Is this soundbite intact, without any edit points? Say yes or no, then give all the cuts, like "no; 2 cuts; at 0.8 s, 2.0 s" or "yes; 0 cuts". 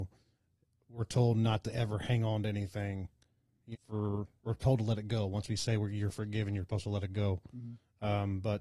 no; 1 cut; at 3.7 s